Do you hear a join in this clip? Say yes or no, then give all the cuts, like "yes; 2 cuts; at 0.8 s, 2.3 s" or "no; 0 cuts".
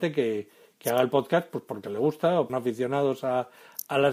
yes; 1 cut; at 2.5 s